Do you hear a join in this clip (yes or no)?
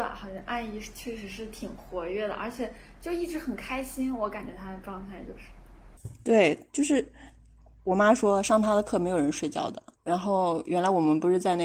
yes